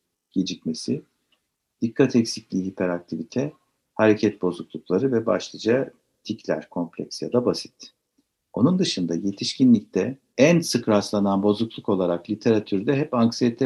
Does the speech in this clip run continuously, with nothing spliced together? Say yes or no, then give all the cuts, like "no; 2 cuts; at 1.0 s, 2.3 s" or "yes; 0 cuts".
yes; 0 cuts